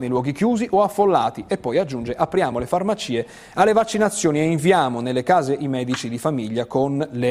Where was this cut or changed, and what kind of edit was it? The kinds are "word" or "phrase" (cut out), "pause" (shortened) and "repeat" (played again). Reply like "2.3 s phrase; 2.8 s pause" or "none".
none

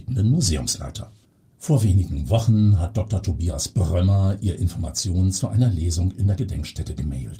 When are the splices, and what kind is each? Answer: none

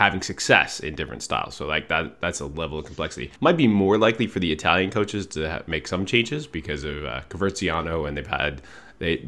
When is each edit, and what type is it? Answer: 3.4 s pause

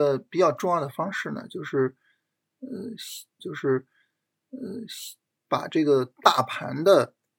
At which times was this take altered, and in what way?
3.4 s repeat

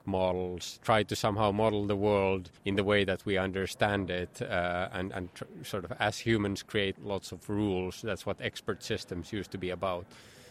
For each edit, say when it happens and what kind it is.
2.6 s pause; 6.9 s phrase

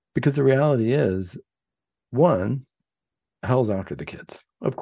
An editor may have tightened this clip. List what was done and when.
none

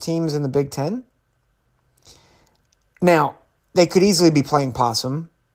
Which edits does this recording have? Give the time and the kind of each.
3.6 s pause

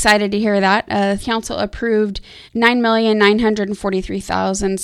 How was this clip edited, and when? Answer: 1.2 s word; 2.5 s pause

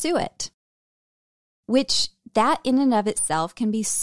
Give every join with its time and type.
none

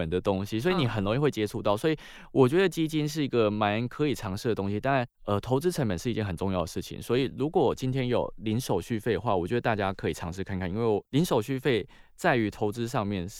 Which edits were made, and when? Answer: 11.1 s pause

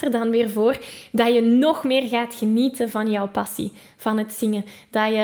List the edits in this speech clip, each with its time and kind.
none

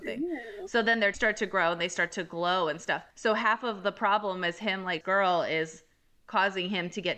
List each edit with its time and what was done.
1.1 s word; 3.1 s pause; 5.0 s phrase

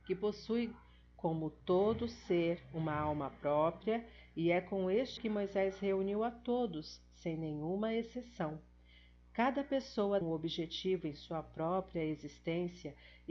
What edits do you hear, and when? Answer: 5.2 s word; 10.2 s word

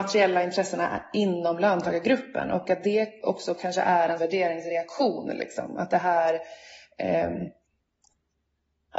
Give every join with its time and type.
4.2 s word

